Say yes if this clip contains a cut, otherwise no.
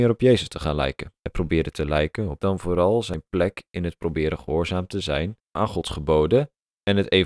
yes